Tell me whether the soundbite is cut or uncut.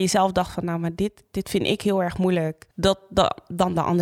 cut